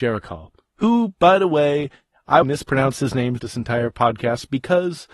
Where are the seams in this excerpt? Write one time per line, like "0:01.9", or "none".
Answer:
0:02.4
0:03.4